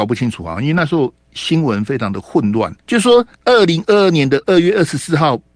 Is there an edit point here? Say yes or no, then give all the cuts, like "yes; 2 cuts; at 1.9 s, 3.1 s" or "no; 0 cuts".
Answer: yes; 2 cuts; at 2.8 s, 3.3 s